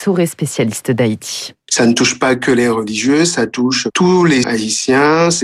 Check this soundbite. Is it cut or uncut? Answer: cut